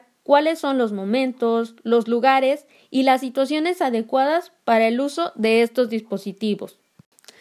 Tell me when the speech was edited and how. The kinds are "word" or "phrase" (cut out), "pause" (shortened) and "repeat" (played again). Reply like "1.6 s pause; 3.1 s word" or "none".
none